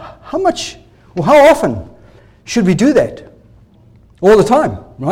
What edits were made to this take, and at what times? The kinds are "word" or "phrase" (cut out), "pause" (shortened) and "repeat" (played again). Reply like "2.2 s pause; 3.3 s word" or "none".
none